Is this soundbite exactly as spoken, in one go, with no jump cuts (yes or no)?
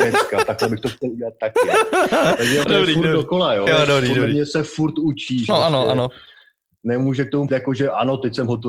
no